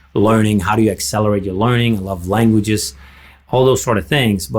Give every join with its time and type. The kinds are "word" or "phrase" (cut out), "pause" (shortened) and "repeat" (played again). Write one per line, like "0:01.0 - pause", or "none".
none